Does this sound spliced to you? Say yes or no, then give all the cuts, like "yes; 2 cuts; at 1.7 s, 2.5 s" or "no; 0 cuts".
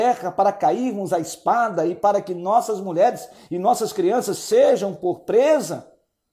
no; 0 cuts